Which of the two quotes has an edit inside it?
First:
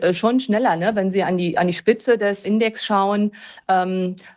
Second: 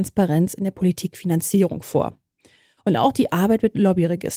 first; 1 cut; at 2.4 s

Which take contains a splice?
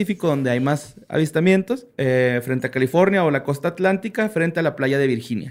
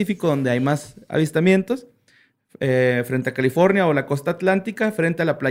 first; 1 cut; at 1.9 s

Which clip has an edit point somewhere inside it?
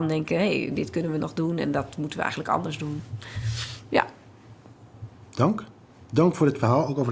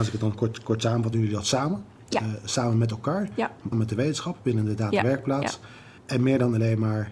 second; 3 cuts; at 1.1 s, 3.7 s, 6.0 s

